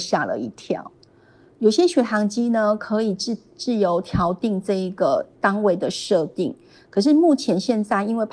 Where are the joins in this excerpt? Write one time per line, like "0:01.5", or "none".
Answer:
none